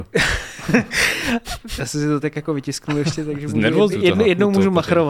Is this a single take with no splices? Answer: no; 2 cuts; at 2.2 s, 3.9 s

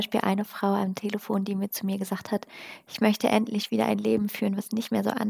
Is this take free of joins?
yes; 0 cuts

